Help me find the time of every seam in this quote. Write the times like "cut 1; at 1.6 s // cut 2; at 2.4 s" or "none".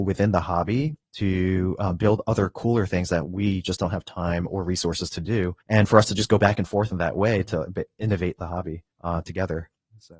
cut 1; at 5.6 s // cut 2; at 8.9 s